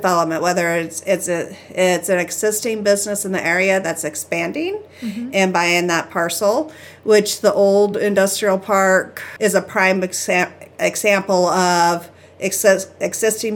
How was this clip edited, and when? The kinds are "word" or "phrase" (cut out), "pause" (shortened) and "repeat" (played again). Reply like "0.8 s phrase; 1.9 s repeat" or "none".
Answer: none